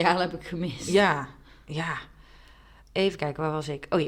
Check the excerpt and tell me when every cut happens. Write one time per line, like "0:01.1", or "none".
none